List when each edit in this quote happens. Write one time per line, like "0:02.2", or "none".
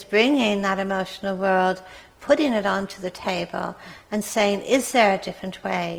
none